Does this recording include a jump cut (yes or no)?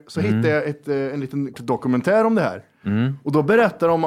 yes